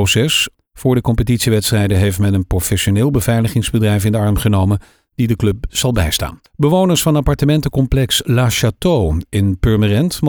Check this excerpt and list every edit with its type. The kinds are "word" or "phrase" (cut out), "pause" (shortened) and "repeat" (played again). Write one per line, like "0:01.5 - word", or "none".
0:06.4 - pause